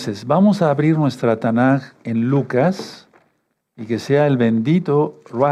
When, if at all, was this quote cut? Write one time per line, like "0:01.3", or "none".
none